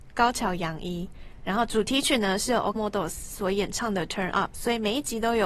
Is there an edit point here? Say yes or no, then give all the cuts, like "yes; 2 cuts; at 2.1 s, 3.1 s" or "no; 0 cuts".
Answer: yes; 1 cut; at 2.8 s